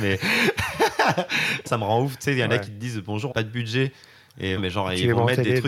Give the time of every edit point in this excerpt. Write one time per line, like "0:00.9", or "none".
0:01.7
0:03.3
0:04.6